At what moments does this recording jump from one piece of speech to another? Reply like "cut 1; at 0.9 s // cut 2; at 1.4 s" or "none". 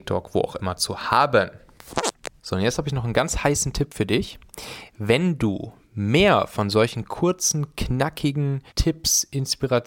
cut 1; at 8.7 s